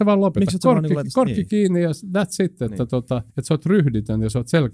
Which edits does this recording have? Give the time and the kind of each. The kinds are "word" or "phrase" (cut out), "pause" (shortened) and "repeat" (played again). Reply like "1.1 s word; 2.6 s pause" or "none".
3.3 s pause